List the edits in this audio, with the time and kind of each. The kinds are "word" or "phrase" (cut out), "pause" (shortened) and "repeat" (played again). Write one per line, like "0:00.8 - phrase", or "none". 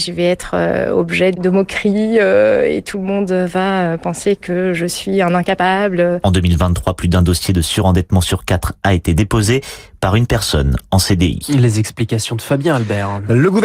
none